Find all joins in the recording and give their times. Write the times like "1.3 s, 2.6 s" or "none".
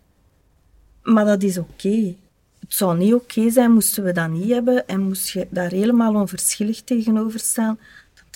2.3 s